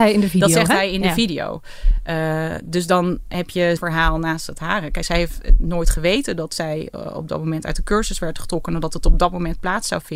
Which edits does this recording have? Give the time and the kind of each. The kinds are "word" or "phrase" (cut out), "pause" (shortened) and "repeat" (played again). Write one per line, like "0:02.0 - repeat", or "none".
0:03.8 - word

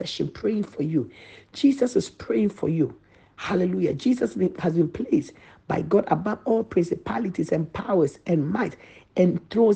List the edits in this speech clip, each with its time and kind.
none

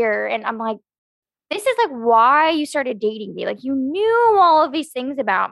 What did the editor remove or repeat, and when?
none

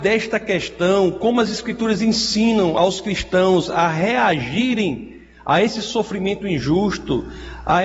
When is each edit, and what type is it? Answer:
none

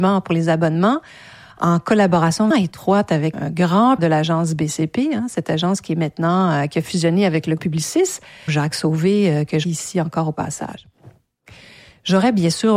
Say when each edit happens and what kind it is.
0:02.5 - word
0:03.3 - word
0:04.0 - word
0:07.6 - word
0:08.5 - word
0:09.6 - word

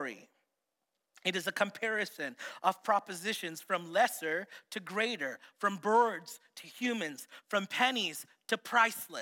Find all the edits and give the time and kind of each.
none

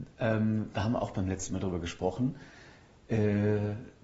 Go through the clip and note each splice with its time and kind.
none

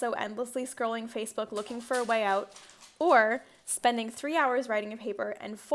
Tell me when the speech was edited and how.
none

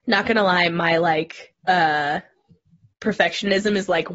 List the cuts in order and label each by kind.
0:01.6 - pause

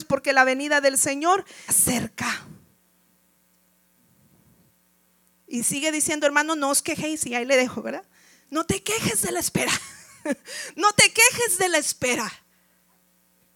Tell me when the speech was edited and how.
0:01.7 - word

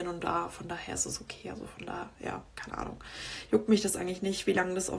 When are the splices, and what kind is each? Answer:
0:02.5 - pause

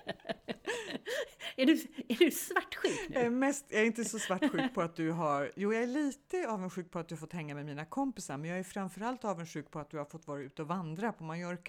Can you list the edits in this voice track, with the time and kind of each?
none

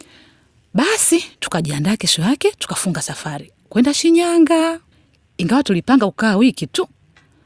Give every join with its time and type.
0:01.3 - pause
0:04.9 - pause

